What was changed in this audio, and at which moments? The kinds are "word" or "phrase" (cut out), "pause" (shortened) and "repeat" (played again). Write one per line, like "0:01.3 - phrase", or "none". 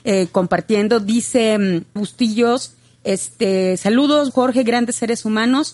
0:02.0 - word
0:04.3 - word